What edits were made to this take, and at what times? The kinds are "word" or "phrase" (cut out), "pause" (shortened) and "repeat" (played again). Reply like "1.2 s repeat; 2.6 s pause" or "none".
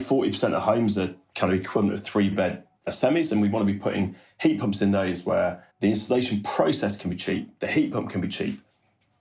5.7 s pause